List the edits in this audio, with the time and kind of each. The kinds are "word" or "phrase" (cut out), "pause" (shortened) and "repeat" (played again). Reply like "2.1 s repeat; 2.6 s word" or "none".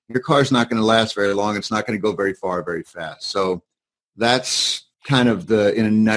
4.9 s pause